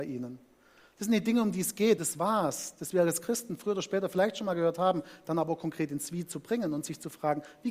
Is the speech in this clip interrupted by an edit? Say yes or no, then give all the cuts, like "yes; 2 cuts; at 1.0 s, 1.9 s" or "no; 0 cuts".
yes; 1 cut; at 2.0 s